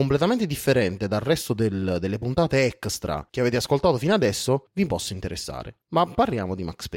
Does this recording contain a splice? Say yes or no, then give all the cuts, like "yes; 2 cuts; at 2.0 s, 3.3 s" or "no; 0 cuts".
no; 0 cuts